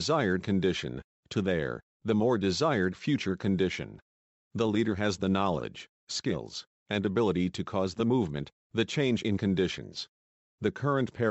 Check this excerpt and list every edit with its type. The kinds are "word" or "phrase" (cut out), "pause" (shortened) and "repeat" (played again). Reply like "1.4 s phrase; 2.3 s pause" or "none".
none